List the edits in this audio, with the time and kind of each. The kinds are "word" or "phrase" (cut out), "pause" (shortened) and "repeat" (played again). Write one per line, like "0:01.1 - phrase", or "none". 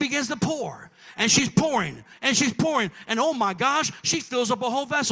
none